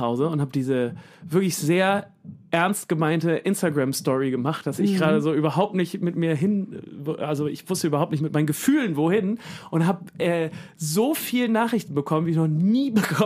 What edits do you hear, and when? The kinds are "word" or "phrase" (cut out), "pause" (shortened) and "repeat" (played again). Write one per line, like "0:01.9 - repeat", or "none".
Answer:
none